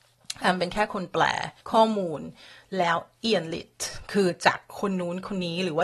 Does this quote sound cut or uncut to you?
cut